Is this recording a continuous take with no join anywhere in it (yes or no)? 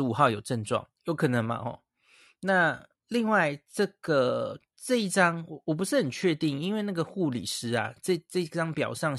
no